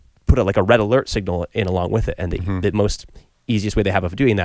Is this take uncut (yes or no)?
no